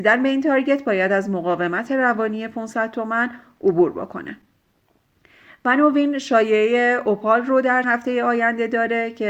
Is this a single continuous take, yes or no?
no